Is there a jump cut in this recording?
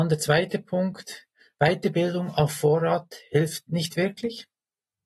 no; 0 cuts

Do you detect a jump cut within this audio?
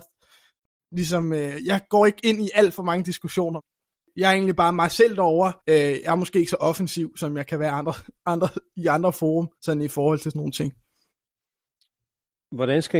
yes; 3 cuts; at 5.6 s, 9.6 s, 10.3 s

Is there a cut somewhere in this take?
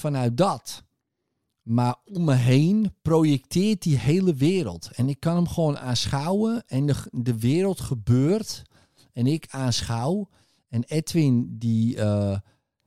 no; 0 cuts

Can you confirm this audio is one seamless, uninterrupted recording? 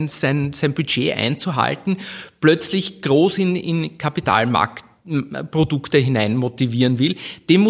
yes; 0 cuts

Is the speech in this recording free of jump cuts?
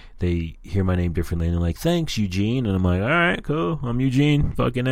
yes; 0 cuts

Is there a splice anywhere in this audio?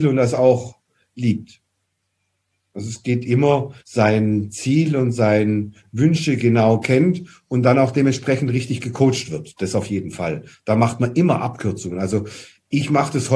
yes; 1 cut; at 3.8 s

